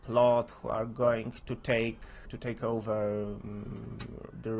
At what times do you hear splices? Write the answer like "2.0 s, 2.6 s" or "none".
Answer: 1.4 s, 2.3 s